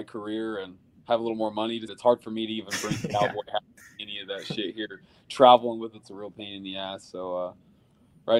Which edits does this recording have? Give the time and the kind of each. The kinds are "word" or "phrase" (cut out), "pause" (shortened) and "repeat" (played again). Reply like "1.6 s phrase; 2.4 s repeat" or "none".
1.9 s word

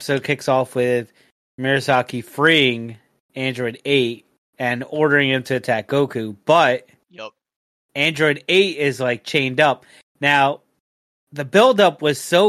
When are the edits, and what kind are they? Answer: none

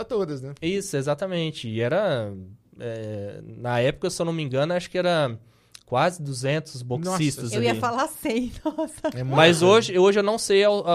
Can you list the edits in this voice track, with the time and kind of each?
none

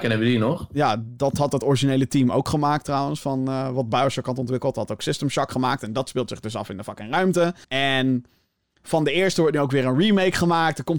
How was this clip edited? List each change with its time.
7.6 s pause

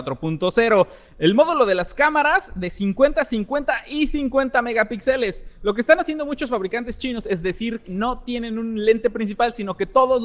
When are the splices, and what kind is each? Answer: 7.8 s word

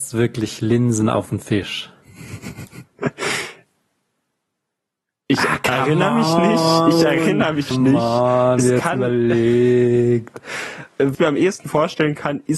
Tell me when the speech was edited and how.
7.7 s word; 11.1 s word

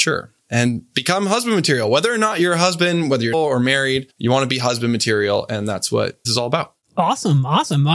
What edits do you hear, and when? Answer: 3.3 s word; 4.1 s pause; 6.2 s word

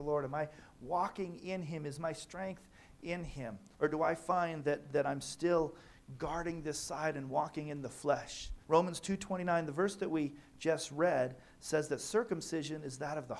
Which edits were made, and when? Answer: 3.7 s pause; 8.6 s pause

